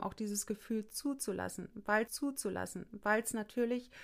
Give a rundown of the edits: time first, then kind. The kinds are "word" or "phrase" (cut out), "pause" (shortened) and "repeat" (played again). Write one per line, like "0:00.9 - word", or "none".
0:02.1 - repeat